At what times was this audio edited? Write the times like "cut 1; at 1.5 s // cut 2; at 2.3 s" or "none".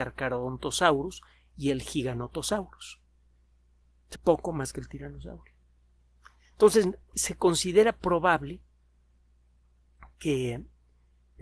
cut 1; at 4.1 s // cut 2; at 4.7 s // cut 3; at 7.1 s // cut 4; at 8.0 s